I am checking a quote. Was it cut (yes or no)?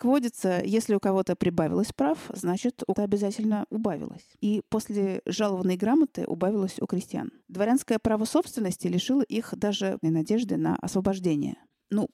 yes